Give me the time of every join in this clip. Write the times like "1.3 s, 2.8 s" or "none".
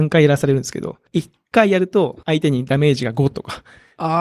1.1 s, 2.2 s